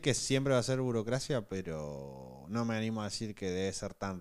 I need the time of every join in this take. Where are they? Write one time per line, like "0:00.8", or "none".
none